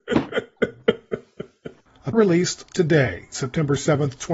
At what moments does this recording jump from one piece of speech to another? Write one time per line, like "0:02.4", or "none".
0:02.1
0:03.3